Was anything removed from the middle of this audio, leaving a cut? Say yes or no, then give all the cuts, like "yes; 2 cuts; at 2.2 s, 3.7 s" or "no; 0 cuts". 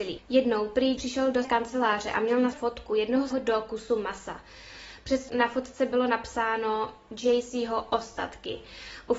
yes; 5 cuts; at 1.0 s, 1.4 s, 2.5 s, 3.3 s, 5.3 s